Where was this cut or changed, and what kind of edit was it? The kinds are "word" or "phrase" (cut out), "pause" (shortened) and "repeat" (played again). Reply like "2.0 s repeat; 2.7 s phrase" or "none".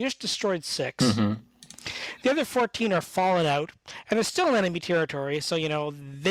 none